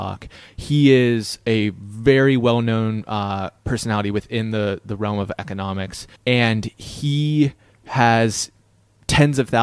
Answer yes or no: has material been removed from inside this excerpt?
yes